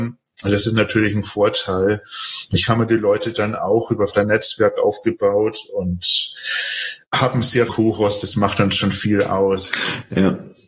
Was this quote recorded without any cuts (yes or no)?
no